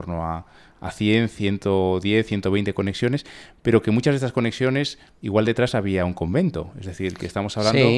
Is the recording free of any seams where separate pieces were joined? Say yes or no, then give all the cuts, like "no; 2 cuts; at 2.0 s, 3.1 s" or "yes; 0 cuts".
yes; 0 cuts